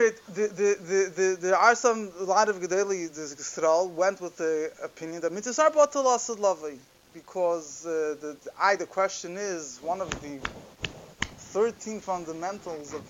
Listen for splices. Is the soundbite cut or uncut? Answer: uncut